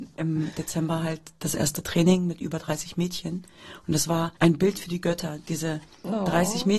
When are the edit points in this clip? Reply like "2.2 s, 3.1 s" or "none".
4.4 s